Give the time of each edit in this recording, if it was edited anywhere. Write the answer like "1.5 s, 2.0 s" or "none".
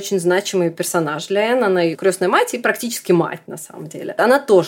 none